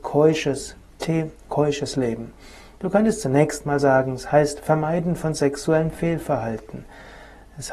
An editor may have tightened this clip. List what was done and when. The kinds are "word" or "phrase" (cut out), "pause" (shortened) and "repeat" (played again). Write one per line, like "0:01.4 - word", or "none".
none